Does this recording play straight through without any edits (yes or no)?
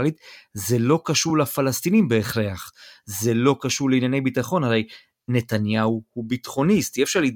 yes